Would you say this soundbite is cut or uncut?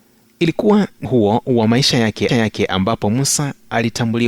cut